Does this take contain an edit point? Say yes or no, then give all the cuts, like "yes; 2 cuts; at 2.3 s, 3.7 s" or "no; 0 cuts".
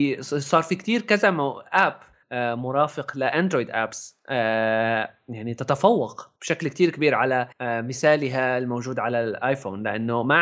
yes; 3 cuts; at 2.2 s, 6.4 s, 7.5 s